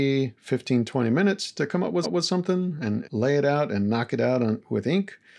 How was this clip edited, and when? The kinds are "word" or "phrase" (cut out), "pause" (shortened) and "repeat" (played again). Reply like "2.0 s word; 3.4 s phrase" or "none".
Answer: 2.0 s repeat; 3.0 s word